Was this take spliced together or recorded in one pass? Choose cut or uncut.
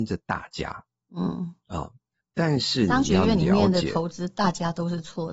uncut